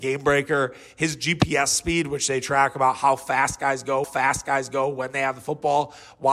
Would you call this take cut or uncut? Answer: cut